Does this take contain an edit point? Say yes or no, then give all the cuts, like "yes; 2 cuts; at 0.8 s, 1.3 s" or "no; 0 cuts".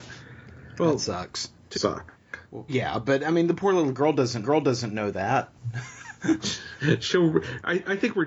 yes; 3 cuts; at 1.7 s, 2.7 s, 4.4 s